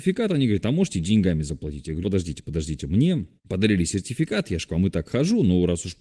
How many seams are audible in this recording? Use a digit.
2